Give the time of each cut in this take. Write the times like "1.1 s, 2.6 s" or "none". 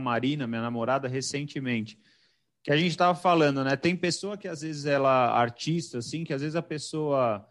none